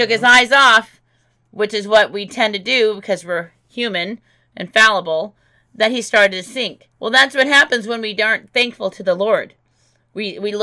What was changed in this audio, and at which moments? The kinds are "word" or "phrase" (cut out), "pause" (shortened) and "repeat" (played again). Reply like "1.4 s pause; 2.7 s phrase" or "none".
6.9 s pause